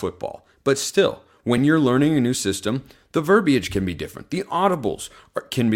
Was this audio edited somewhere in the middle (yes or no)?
no